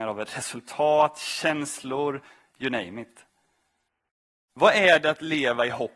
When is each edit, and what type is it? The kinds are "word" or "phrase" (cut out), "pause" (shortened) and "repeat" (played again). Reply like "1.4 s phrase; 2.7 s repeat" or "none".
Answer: none